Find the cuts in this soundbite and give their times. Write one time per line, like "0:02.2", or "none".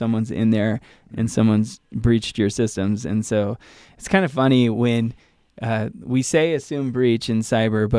none